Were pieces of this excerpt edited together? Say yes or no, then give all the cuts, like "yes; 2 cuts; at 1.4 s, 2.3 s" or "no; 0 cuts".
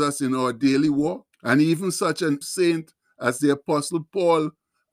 yes; 2 cuts; at 1.3 s, 2.4 s